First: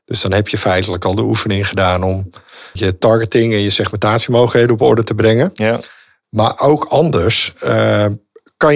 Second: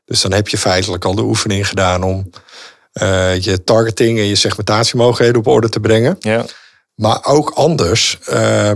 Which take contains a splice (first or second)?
first